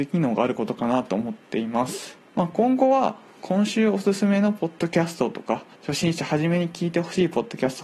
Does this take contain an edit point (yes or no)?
yes